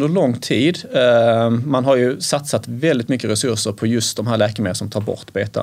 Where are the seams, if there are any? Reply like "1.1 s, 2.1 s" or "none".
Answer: none